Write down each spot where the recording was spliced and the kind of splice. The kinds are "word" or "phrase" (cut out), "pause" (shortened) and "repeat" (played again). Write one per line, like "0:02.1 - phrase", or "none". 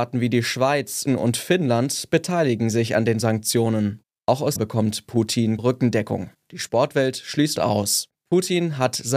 0:01.1 - word
0:04.6 - word
0:05.6 - word
0:07.6 - word